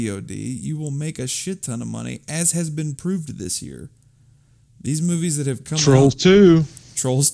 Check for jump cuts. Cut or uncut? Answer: uncut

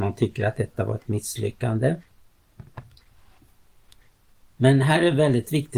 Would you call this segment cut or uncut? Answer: uncut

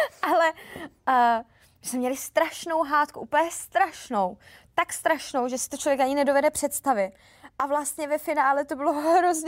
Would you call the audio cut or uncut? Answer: uncut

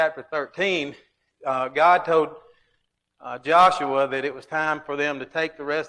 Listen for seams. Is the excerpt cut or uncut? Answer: uncut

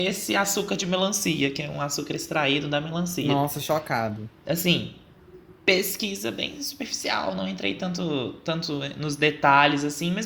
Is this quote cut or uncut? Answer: uncut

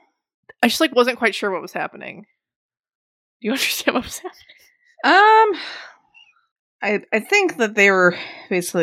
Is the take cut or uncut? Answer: uncut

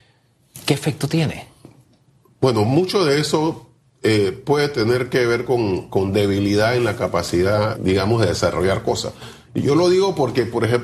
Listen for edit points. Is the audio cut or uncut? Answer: cut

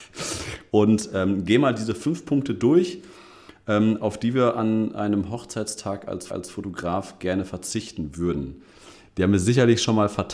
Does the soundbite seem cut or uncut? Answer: cut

